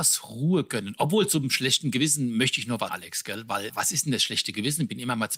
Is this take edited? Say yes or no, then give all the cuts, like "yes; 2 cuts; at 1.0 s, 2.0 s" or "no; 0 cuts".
yes; 2 cuts; at 2.9 s, 3.7 s